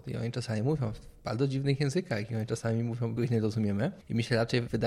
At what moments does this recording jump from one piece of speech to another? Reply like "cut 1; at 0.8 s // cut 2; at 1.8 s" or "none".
cut 1; at 3.2 s